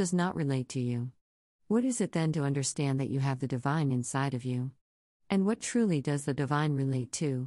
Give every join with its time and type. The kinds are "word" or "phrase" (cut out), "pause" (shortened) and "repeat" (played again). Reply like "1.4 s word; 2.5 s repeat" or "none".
none